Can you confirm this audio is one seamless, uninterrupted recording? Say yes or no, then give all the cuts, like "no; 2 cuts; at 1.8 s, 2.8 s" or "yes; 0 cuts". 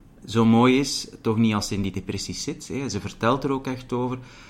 yes; 0 cuts